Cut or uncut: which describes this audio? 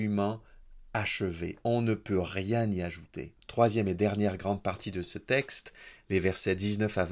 cut